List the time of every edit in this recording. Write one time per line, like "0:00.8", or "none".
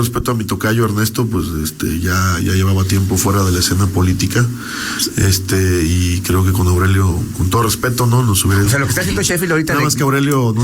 none